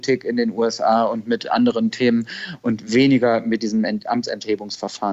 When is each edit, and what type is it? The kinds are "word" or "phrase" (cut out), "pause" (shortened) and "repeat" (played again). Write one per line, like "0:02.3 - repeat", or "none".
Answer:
none

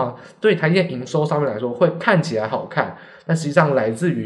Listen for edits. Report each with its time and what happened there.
none

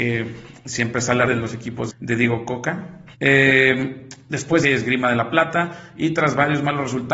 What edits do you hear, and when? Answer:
0:01.3 - word
0:01.9 - word
0:03.1 - pause
0:04.6 - phrase

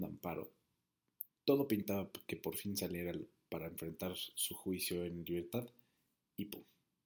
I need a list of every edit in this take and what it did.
none

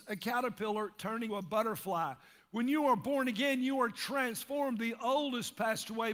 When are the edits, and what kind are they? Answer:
0:01.3 - word

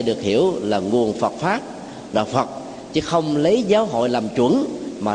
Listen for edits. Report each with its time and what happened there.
0:02.1 - word

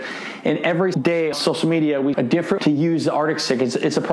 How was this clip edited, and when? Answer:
0:00.9 - word
0:01.3 - word
0:02.1 - word
0:02.6 - word

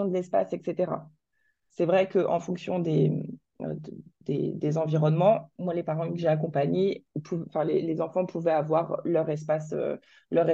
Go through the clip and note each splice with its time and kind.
none

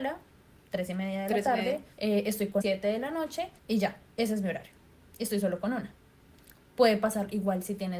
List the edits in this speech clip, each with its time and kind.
0:01.9 - pause
0:02.6 - phrase
0:03.6 - pause

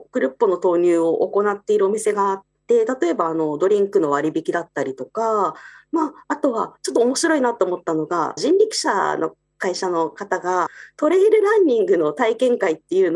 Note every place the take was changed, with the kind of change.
none

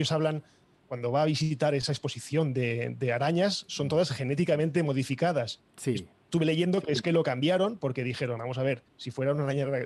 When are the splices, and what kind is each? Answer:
0:05.7 - pause
0:08.9 - pause

